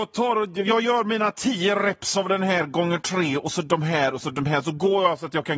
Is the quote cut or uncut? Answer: uncut